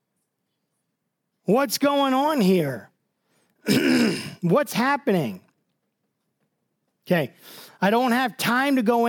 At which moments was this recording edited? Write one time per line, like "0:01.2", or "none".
none